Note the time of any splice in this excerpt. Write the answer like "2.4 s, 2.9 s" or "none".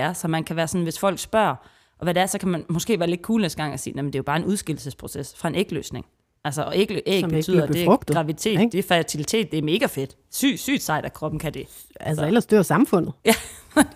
none